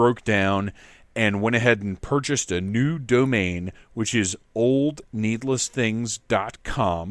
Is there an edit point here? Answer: no; 0 cuts

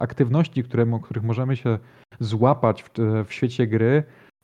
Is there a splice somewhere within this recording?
no; 0 cuts

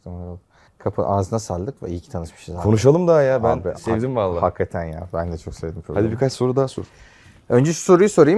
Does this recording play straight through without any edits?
yes; 0 cuts

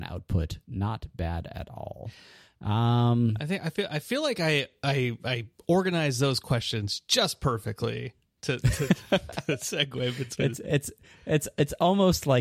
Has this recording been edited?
no; 0 cuts

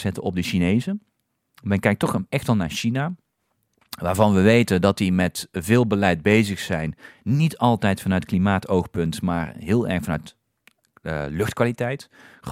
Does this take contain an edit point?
no; 0 cuts

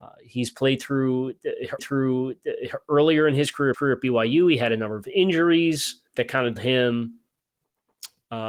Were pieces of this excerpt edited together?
yes; 4 cuts; at 1.8 s, 3.7 s, 6.1 s, 6.6 s

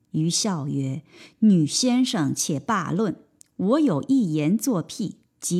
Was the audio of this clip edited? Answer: no; 0 cuts

